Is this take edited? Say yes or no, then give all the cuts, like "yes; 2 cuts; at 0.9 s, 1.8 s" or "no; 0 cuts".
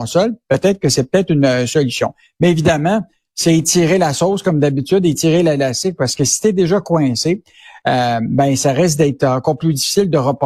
no; 0 cuts